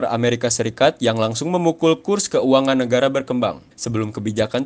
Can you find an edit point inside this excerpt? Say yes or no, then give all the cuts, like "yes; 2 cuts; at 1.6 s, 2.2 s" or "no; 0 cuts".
yes; 1 cut; at 3.7 s